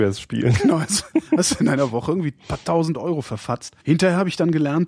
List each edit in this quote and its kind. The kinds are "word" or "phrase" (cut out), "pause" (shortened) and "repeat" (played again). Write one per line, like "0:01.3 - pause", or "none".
0:03.8 - pause